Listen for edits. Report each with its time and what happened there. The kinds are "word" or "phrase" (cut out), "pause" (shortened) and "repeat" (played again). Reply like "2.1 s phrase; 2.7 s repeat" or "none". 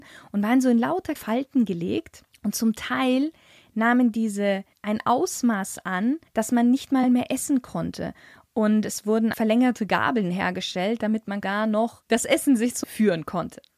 1.2 s word; 4.7 s word; 6.3 s pause; 7.0 s word; 9.3 s word; 12.8 s word

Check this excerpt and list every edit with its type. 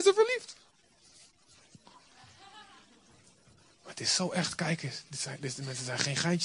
none

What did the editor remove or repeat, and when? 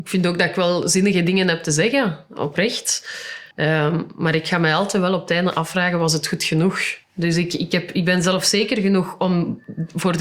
3.5 s pause; 7.0 s pause

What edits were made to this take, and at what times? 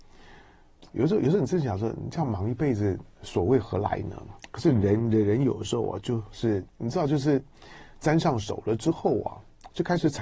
6.7 s pause

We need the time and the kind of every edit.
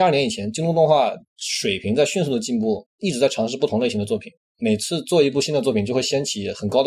1.3 s pause

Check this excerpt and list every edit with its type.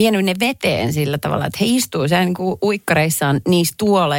none

